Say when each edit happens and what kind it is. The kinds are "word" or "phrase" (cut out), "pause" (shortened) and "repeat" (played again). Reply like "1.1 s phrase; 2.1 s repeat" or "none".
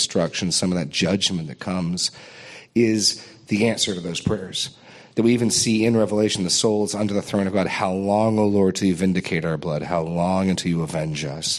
none